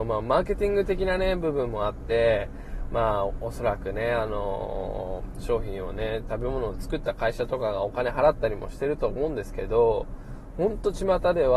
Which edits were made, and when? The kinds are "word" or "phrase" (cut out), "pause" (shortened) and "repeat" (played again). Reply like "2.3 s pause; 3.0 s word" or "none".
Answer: none